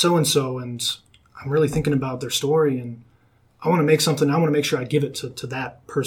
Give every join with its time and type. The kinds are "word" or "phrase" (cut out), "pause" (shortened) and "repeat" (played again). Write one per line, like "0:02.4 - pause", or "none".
none